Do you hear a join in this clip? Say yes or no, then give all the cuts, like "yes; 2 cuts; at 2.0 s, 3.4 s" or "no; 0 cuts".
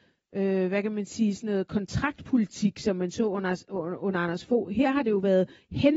no; 0 cuts